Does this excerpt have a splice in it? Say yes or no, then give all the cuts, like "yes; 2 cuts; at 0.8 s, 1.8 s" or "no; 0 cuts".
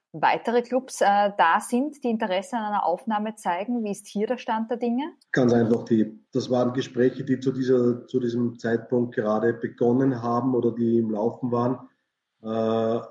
yes; 2 cuts; at 5.2 s, 6.3 s